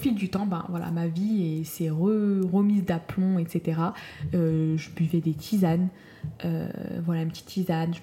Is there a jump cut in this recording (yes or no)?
no